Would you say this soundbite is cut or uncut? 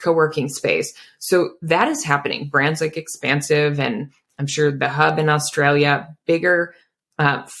uncut